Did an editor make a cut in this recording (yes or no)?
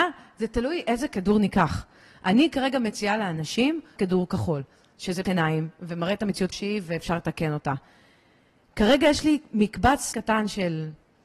yes